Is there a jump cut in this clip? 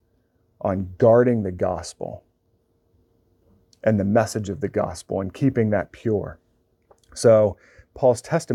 no; 0 cuts

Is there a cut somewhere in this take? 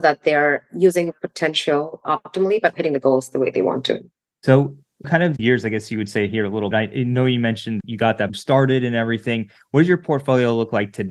yes; 7 cuts; at 1.1 s, 2.7 s, 5.0 s, 5.4 s, 6.7 s, 7.8 s, 8.3 s

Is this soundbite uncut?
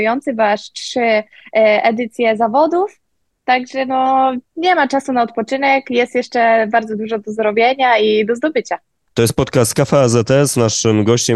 yes; 0 cuts

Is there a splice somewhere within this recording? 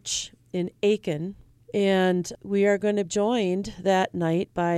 yes; 2 cuts; at 2.3 s, 3.1 s

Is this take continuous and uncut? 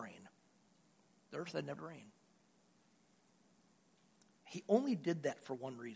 no; 1 cut; at 1.8 s

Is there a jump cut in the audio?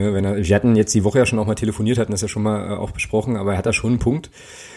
no; 0 cuts

